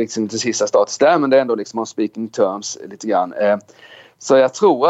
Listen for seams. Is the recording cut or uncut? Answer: uncut